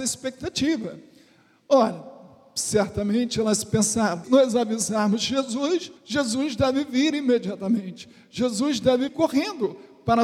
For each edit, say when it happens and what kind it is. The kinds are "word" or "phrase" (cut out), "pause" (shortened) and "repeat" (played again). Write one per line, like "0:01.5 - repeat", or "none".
0:04.2 - word
0:06.0 - pause
0:09.1 - word